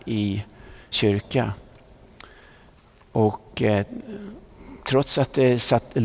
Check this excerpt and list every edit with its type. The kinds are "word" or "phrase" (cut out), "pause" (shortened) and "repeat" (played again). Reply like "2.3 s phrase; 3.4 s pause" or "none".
0.9 s word; 4.8 s pause